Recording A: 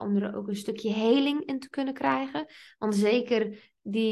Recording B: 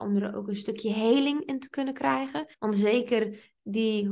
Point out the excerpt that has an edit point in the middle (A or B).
B